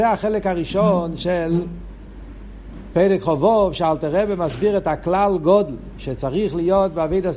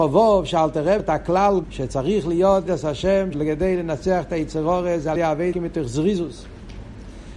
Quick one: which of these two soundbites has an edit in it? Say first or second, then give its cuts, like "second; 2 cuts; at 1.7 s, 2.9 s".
second; 6 cuts; at 1.0 s, 1.6 s, 2.7 s, 3.3 s, 5.2 s, 5.5 s